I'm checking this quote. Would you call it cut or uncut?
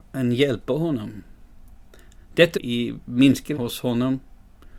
cut